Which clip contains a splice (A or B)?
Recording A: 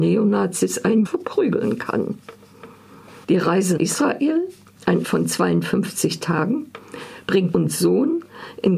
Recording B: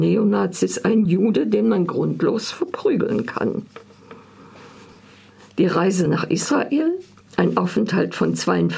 A